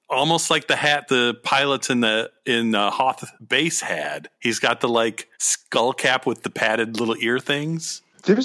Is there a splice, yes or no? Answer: yes